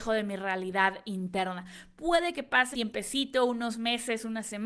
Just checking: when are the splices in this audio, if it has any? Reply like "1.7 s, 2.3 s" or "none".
2.7 s